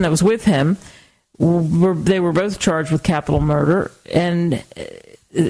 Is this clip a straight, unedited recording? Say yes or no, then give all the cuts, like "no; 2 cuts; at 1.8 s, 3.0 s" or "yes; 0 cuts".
yes; 0 cuts